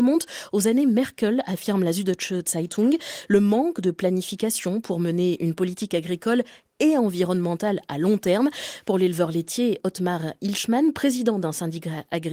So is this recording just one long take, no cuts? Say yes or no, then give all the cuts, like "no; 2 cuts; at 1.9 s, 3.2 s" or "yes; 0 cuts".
yes; 0 cuts